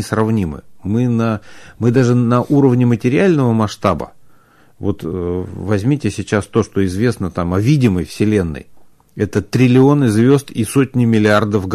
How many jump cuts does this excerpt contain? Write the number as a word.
zero